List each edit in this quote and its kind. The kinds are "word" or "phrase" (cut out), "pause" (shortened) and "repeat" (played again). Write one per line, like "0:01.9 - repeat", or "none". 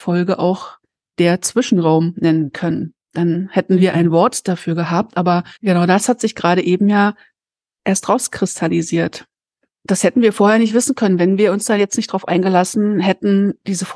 0:05.5 - pause

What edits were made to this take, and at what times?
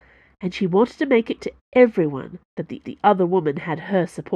0:01.4 - word
0:02.5 - pause
0:02.8 - repeat

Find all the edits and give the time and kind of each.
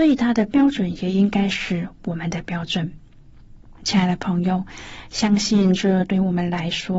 0:03.8 - pause

